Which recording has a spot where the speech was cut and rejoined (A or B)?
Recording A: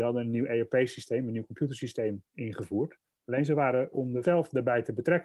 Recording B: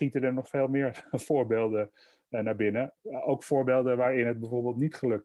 A